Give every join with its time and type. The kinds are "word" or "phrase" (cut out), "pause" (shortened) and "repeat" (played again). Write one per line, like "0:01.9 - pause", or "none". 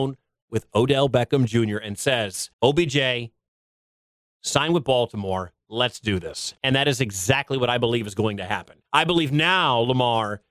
0:02.5 - pause
0:06.6 - pause
0:08.9 - pause